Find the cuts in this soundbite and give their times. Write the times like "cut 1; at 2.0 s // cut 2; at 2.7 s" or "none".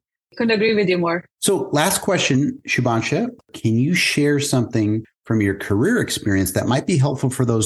cut 1; at 1.3 s